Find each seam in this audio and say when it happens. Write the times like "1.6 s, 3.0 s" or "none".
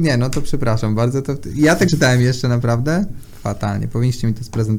1.9 s